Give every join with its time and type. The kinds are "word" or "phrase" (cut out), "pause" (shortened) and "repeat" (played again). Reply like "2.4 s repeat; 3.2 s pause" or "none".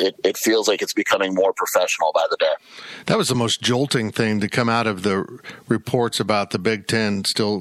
none